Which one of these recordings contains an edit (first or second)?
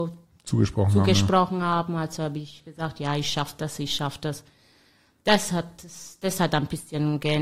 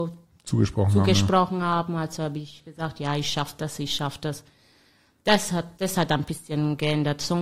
second